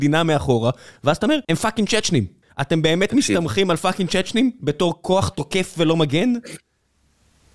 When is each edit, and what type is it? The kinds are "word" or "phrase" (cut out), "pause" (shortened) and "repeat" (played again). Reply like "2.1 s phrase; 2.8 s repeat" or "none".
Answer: 1.4 s pause; 2.4 s pause